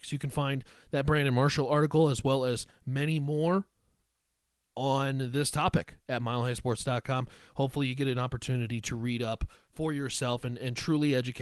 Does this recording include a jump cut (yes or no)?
no